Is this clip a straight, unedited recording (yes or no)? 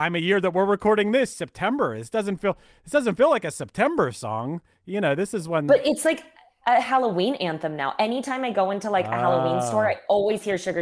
yes